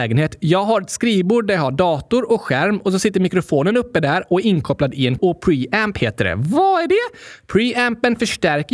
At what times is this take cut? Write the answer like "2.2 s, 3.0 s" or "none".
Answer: 5.2 s